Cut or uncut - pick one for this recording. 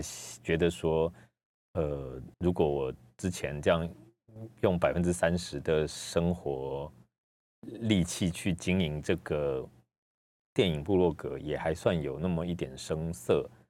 cut